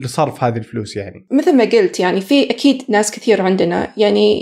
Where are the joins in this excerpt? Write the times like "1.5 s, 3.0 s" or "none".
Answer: none